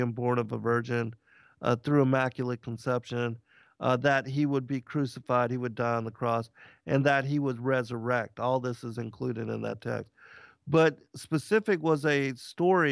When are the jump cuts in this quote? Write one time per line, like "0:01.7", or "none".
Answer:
none